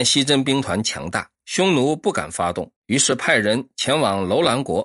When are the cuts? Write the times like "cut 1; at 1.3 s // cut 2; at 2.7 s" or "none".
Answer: cut 1; at 1.3 s // cut 2; at 2.8 s